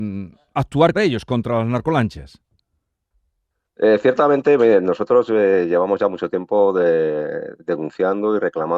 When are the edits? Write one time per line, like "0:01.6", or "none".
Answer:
0:00.9

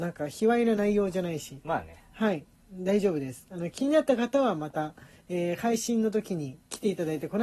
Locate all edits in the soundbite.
none

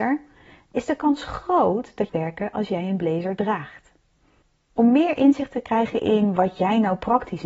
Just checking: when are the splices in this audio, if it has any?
0:02.1

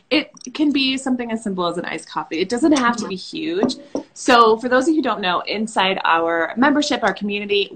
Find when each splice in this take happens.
none

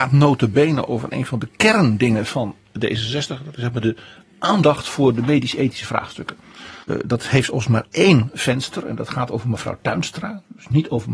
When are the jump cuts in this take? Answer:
0:06.8

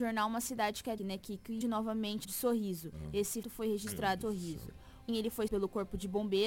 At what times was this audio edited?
0:01.0
0:01.6
0:02.2
0:03.4
0:04.2
0:05.1
0:05.5

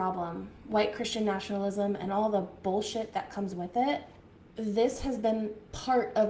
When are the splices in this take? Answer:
none

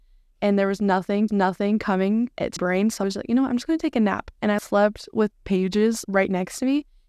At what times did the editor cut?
0:01.3
0:02.6
0:03.0
0:04.6
0:05.3
0:06.0

